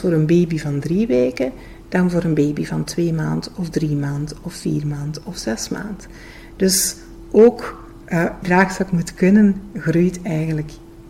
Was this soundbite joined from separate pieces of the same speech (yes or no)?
yes